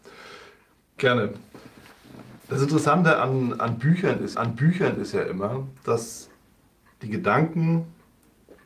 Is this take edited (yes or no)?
yes